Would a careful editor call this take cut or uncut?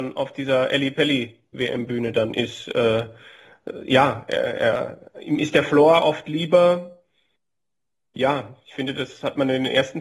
uncut